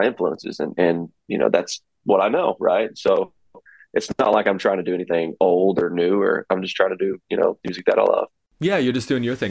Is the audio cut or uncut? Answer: uncut